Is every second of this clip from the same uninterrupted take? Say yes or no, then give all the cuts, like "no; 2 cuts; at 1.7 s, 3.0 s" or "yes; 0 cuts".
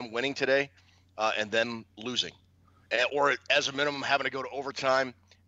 no; 1 cut; at 3.1 s